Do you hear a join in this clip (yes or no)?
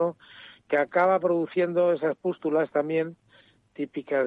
no